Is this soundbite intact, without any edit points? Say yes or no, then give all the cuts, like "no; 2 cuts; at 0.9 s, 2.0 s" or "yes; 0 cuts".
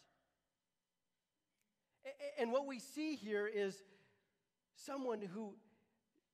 yes; 0 cuts